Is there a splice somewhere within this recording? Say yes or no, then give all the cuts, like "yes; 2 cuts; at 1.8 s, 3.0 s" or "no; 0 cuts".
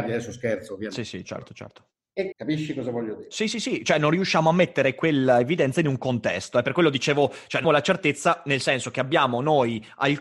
yes; 3 cuts; at 1.2 s, 2.3 s, 7.6 s